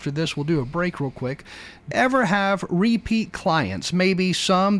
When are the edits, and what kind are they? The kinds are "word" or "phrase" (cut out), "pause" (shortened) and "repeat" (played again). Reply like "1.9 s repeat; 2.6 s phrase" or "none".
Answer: 1.9 s word